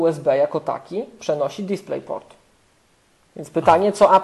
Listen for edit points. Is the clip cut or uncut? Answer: uncut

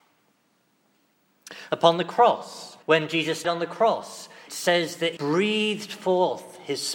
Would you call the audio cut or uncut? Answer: cut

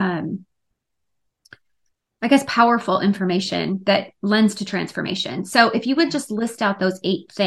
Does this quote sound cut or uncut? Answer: uncut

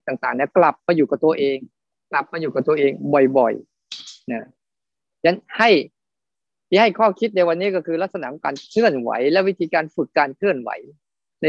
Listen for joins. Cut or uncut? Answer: uncut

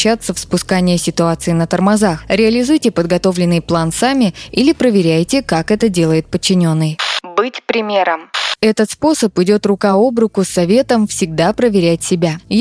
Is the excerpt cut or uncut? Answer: uncut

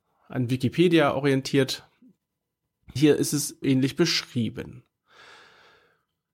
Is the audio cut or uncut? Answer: cut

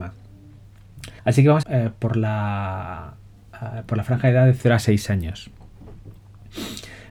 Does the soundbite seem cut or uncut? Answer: cut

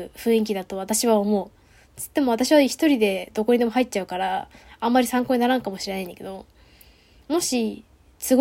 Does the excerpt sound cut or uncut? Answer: uncut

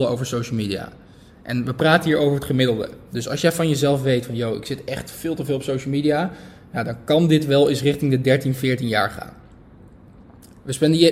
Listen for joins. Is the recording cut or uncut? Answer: uncut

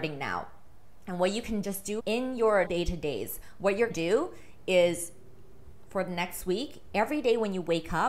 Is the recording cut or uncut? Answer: cut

